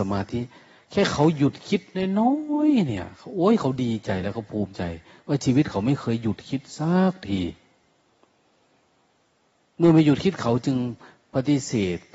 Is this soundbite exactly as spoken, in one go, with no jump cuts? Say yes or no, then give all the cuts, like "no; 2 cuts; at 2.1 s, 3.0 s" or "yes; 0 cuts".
yes; 0 cuts